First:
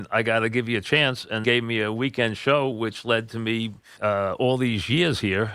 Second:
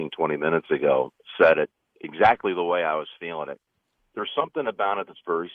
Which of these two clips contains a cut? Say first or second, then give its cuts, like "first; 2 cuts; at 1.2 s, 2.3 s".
first; 2 cuts; at 1.4 s, 4.0 s